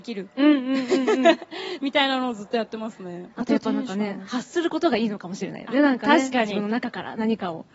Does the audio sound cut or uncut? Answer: cut